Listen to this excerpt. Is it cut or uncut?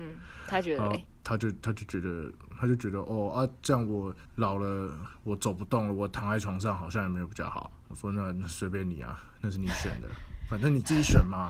cut